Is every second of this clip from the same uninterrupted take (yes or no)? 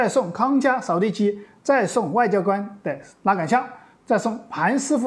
yes